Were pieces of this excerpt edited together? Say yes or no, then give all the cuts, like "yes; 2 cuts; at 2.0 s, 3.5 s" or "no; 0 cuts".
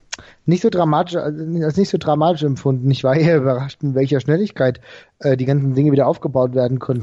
no; 0 cuts